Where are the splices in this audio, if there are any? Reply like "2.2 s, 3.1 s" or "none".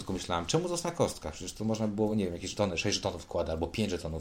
none